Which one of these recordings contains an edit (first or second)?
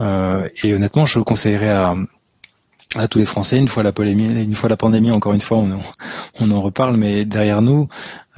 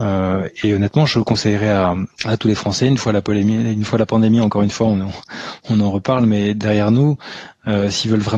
second